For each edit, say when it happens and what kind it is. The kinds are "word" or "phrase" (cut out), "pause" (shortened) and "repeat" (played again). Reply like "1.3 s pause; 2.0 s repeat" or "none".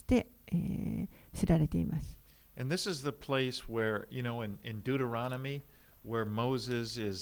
none